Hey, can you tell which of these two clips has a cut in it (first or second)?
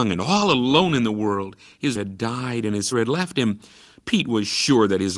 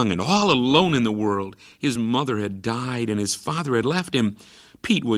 first